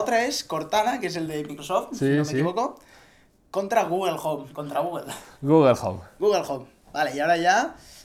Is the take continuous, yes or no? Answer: yes